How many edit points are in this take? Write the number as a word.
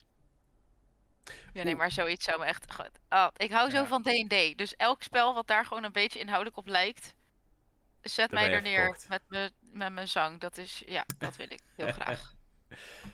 zero